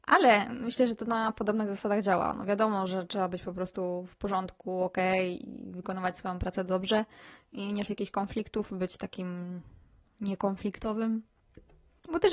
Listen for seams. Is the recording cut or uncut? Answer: cut